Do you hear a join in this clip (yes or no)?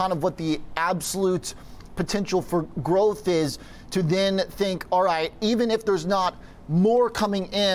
no